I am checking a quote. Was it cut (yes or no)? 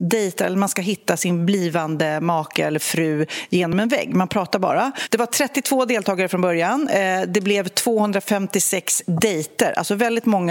no